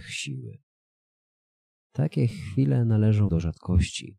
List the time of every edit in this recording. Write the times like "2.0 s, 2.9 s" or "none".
3.3 s